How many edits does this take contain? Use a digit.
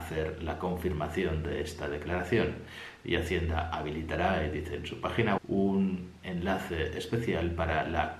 1